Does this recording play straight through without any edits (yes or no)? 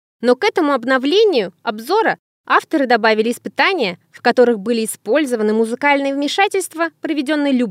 yes